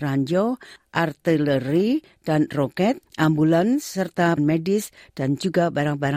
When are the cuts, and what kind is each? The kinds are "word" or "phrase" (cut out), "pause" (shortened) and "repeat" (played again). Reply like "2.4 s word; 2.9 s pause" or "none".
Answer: 3.1 s pause; 4.4 s word